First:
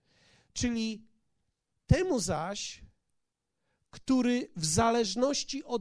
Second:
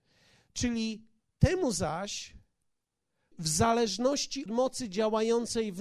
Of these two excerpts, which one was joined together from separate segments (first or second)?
second